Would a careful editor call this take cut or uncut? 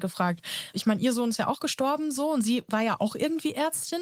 uncut